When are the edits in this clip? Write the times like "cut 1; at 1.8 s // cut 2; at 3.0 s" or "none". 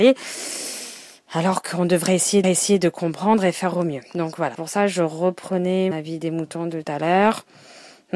cut 1; at 2.4 s // cut 2; at 4.5 s // cut 3; at 5.9 s // cut 4; at 6.8 s